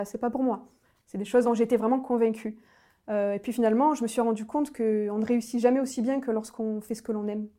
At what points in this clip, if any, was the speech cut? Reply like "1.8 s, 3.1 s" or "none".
1.4 s